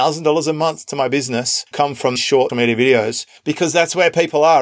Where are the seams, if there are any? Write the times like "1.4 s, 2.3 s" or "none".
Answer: 1.7 s, 2.2 s, 2.5 s